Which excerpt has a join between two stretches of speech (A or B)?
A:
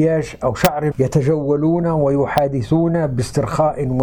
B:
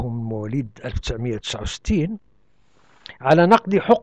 A